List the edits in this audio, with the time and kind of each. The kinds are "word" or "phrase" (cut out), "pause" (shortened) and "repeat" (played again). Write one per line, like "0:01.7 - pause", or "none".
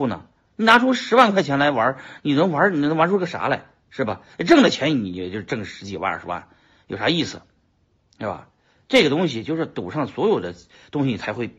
none